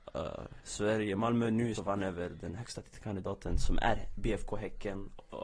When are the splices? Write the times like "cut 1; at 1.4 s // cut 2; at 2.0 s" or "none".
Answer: cut 1; at 1.8 s